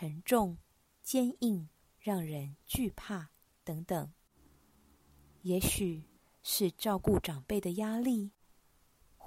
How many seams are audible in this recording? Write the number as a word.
one